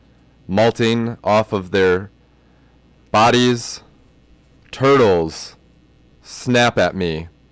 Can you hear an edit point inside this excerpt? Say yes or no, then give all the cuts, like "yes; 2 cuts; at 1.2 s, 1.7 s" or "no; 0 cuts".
no; 0 cuts